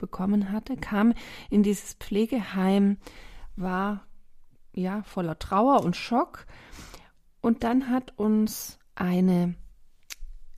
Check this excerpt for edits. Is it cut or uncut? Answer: uncut